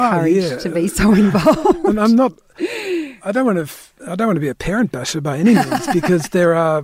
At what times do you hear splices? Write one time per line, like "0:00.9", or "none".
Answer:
0:04.0